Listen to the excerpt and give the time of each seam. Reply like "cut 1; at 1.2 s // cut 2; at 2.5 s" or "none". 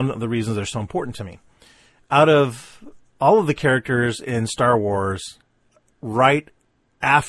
none

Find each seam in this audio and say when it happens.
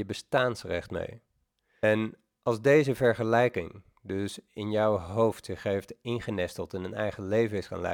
none

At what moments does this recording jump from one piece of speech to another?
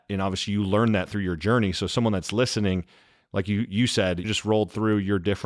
cut 1; at 4.2 s

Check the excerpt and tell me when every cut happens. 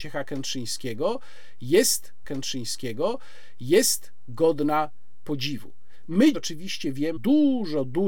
cut 1; at 2.2 s // cut 2; at 6.3 s // cut 3; at 7.2 s

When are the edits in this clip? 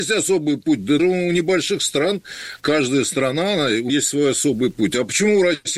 cut 1; at 1.0 s // cut 2; at 3.9 s

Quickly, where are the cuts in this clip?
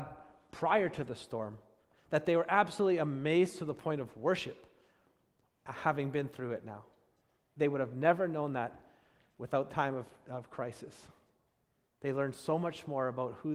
cut 1; at 9.7 s

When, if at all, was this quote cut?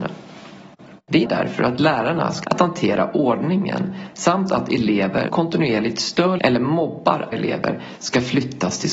cut 1; at 1.2 s // cut 2; at 2.4 s // cut 3; at 5.3 s // cut 4; at 6.4 s // cut 5; at 7.3 s

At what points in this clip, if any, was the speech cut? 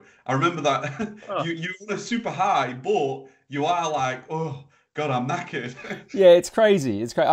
none

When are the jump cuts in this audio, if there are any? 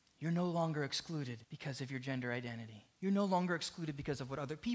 cut 1; at 1.4 s // cut 2; at 2.9 s

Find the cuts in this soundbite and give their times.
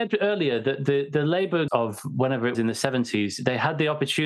cut 1; at 1.7 s // cut 2; at 2.5 s

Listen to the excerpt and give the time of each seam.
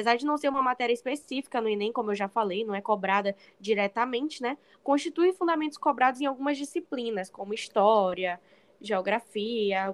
none

